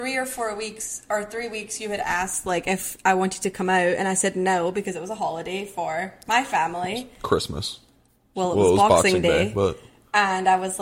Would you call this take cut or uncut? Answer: uncut